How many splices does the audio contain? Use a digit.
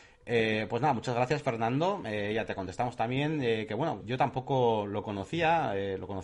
1